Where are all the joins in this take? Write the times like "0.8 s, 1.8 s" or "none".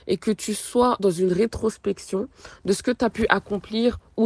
1.0 s